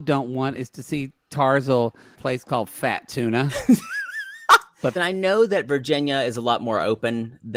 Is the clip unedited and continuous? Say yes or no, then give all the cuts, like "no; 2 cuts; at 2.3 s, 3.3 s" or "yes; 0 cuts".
no; 2 cuts; at 2.1 s, 5.0 s